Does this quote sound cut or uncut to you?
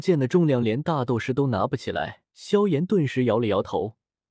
cut